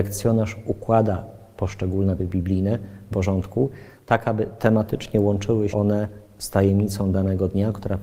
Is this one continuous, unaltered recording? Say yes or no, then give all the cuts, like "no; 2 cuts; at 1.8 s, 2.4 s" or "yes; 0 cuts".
no; 3 cuts; at 2.2 s, 3.1 s, 5.7 s